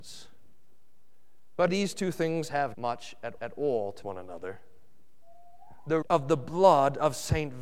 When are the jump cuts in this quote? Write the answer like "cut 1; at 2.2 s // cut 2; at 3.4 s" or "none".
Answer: cut 1; at 1.7 s // cut 2; at 2.7 s // cut 3; at 3.4 s // cut 4; at 4.0 s // cut 5; at 6.0 s